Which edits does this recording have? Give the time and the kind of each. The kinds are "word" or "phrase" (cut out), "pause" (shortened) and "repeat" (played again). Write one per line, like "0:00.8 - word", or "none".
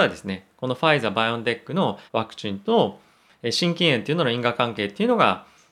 0:02.1 - pause